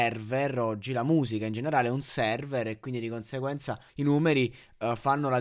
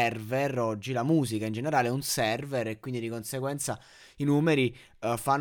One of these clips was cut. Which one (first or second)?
first